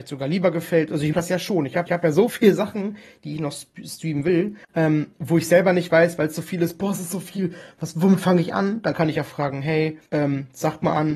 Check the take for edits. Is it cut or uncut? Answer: cut